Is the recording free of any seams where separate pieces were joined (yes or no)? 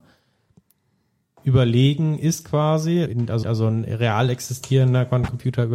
no